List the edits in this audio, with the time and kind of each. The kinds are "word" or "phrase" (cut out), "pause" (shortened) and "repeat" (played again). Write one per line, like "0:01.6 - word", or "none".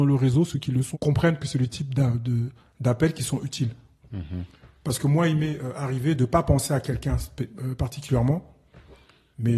0:00.9 - word